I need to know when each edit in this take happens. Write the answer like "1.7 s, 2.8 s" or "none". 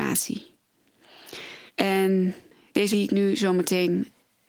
1.7 s, 2.9 s

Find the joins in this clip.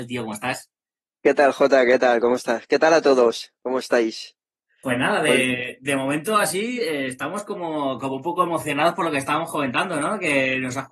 none

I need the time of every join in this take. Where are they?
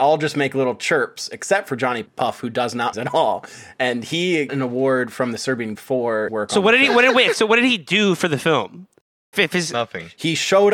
2.1 s, 2.9 s, 4.5 s, 5.7 s, 6.3 s, 9.3 s

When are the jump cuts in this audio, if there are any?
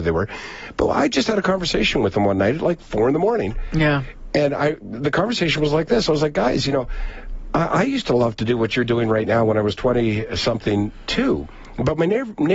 none

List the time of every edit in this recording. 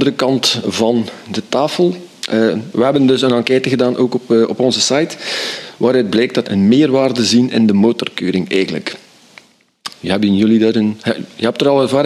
6.4 s

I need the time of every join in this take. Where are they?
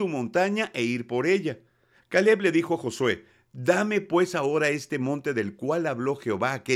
none

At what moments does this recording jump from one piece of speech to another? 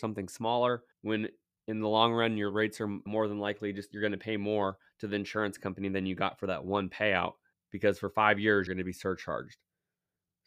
0.9 s, 3.1 s, 7.5 s, 8.7 s

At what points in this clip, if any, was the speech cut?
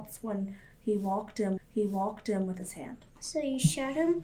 1.6 s, 2.6 s, 3.1 s

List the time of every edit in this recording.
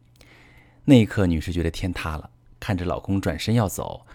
2.5 s

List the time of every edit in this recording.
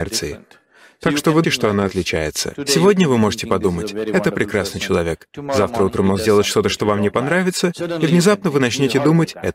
1.4 s

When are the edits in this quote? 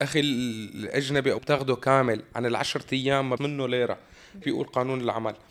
1.4 s, 3.4 s, 4.4 s

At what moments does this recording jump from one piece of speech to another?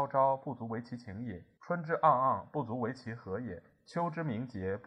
1.6 s

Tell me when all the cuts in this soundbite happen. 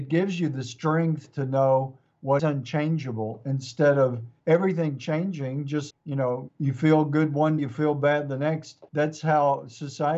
2.4 s, 4.4 s, 5.9 s, 6.5 s, 7.6 s, 8.9 s

